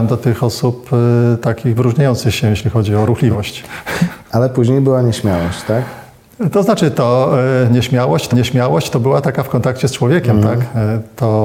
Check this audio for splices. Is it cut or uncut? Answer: cut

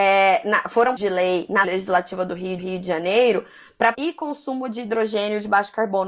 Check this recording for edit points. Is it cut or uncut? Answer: cut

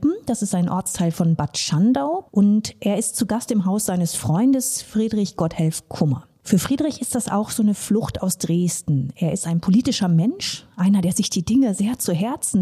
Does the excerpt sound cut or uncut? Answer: uncut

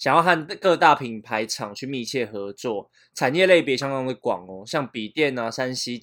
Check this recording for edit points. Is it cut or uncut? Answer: uncut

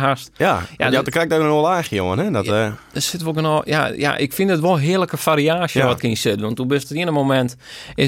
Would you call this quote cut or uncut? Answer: cut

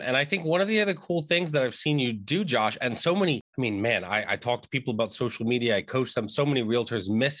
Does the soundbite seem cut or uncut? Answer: cut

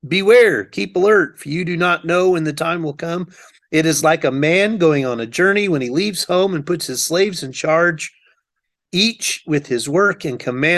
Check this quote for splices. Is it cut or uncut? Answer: uncut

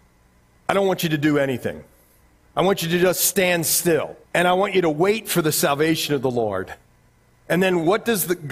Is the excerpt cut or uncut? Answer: cut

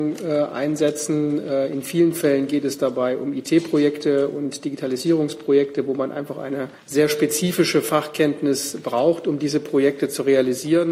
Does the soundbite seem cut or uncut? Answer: cut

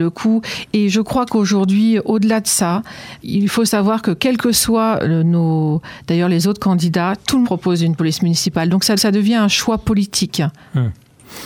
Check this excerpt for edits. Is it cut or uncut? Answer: cut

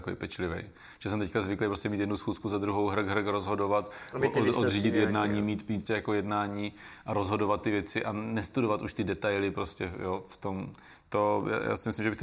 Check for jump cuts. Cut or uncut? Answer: cut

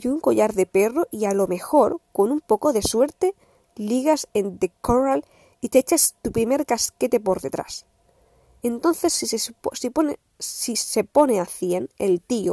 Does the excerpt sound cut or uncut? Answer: uncut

